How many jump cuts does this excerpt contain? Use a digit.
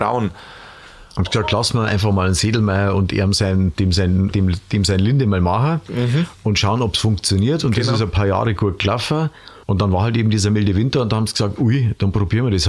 2